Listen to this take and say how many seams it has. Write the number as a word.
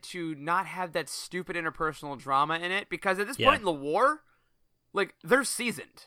zero